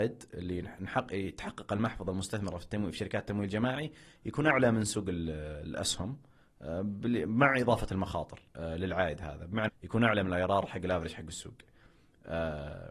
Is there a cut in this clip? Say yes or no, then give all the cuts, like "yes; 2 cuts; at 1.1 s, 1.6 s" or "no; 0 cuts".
yes; 1 cut; at 9.7 s